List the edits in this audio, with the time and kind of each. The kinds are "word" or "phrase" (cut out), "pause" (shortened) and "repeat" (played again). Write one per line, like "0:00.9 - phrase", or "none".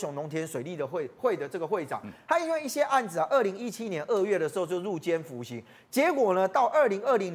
none